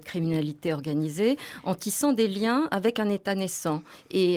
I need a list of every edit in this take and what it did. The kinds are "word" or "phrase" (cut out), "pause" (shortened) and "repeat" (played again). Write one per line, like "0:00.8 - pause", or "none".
none